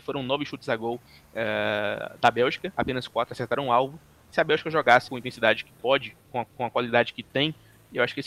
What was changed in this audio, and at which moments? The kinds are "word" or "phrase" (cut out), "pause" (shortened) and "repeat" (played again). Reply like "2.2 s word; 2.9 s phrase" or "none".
5.1 s word; 6.5 s repeat